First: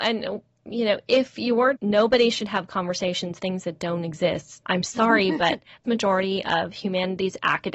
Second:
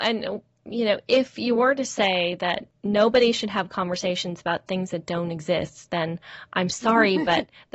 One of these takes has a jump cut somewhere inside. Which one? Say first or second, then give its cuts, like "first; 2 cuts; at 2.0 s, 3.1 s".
first; 4 cuts; at 1.8 s, 3.4 s, 4.6 s, 5.8 s